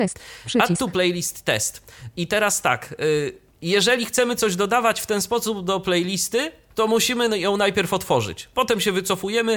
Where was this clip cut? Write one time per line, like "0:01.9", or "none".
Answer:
0:03.5